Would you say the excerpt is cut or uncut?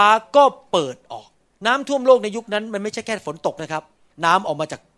uncut